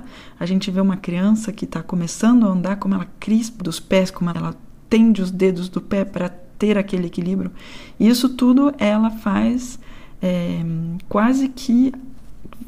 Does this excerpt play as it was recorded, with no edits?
no; 2 cuts; at 3.6 s, 4.3 s

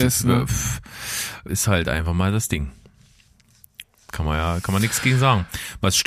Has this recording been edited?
yes; 1 cut; at 1.5 s

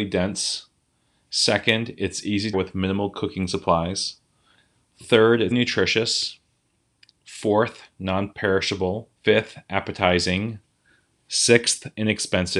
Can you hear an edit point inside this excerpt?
yes; 3 cuts; at 2.5 s, 5.5 s, 9.2 s

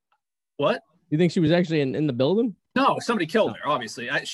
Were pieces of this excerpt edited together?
no; 0 cuts

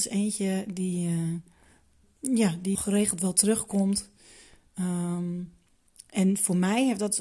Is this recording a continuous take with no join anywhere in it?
no; 2 cuts; at 2.0 s, 2.7 s

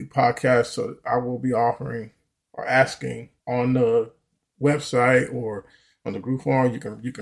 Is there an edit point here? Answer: yes; 1 cut; at 3.4 s

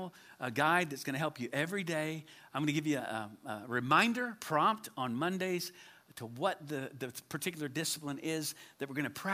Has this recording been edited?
no; 0 cuts

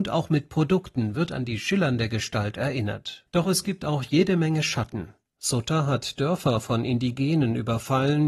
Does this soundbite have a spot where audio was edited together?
yes; 1 cut; at 3.3 s

